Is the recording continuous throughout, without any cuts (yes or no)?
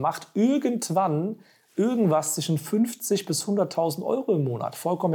yes